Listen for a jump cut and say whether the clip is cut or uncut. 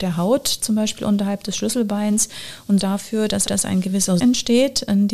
cut